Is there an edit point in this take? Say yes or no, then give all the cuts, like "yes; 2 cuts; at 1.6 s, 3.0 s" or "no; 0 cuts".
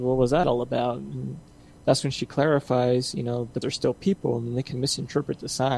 yes; 1 cut; at 3.6 s